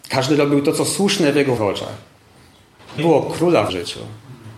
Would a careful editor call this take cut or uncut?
cut